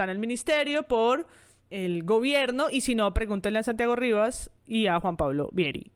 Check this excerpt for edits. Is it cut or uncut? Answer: cut